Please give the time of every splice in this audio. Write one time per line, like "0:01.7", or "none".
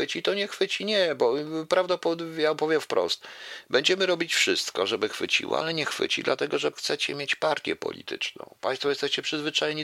0:06.7